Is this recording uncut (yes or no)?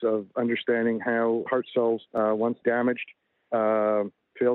no